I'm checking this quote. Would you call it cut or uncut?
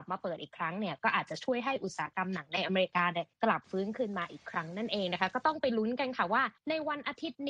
cut